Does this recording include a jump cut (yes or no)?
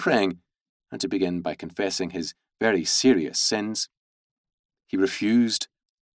no